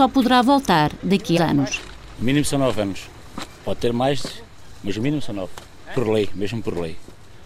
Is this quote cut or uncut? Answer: cut